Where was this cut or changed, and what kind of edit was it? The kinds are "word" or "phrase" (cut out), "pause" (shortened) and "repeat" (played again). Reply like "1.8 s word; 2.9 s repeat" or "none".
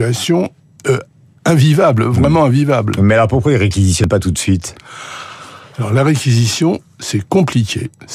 none